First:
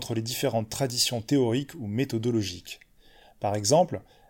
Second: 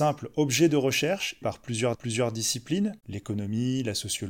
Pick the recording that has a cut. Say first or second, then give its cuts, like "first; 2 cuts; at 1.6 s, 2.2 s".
second; 2 cuts; at 1.4 s, 1.9 s